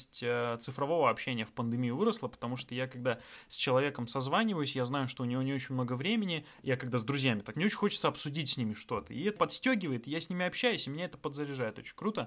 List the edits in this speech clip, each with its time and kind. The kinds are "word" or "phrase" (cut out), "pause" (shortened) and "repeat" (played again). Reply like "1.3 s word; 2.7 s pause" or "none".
7.5 s word; 9.4 s word